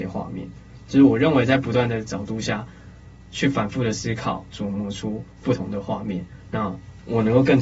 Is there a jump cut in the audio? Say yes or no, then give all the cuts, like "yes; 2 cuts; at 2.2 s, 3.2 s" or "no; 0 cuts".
yes; 1 cut; at 4.5 s